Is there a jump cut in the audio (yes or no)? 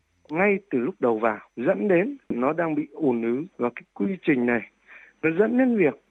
yes